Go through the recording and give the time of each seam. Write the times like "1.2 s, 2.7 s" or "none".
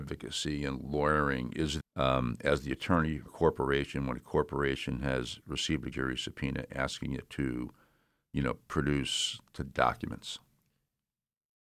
1.8 s, 3.3 s, 5.9 s